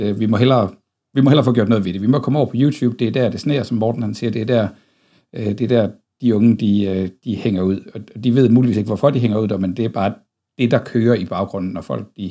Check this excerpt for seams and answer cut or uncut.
uncut